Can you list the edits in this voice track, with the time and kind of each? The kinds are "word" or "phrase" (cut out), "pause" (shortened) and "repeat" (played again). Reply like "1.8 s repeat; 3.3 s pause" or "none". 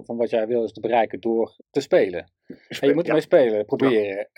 1.6 s pause